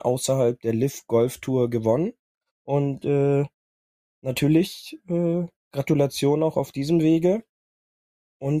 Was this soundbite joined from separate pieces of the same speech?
no; 0 cuts

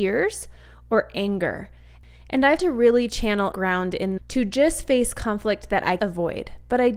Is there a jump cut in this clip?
yes; 4 cuts; at 2.6 s, 3.5 s, 4.2 s, 6.0 s

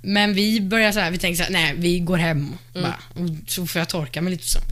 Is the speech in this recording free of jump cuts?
yes; 0 cuts

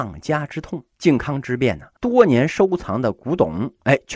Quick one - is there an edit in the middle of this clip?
yes; 2 cuts; at 0.9 s, 2.0 s

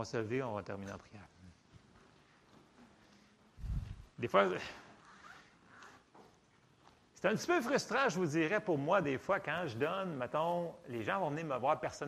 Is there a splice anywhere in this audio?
no; 0 cuts

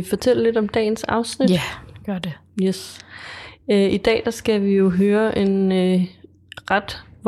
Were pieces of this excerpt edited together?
no; 0 cuts

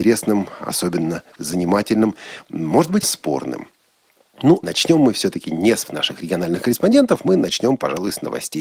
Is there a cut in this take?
yes; 3 cuts; at 3.0 s, 4.6 s, 5.8 s

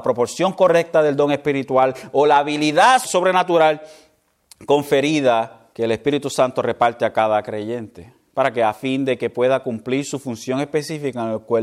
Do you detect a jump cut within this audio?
yes; 2 cuts; at 3.0 s, 5.7 s

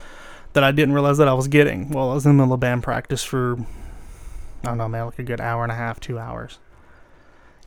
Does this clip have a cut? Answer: no; 0 cuts

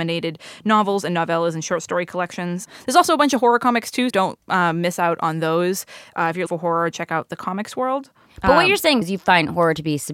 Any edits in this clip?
yes; 4 cuts; at 4.1 s, 6.5 s, 6.9 s, 9.0 s

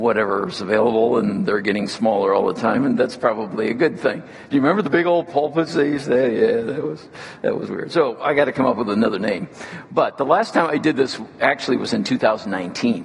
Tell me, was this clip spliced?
no; 0 cuts

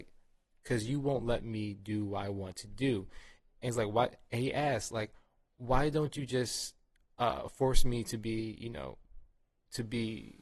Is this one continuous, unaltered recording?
yes; 0 cuts

